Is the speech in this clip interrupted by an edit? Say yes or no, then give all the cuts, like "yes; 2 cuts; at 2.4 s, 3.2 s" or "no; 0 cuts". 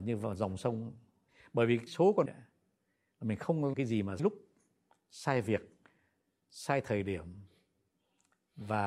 yes; 4 cuts; at 1.9 s, 2.3 s, 3.7 s, 4.2 s